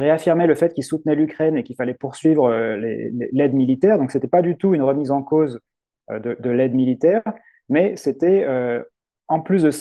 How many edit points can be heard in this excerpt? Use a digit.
0